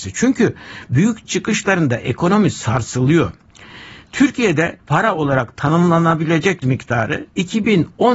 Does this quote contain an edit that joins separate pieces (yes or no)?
yes